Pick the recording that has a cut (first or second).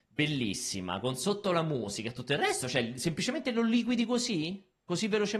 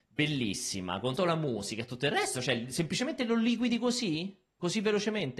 second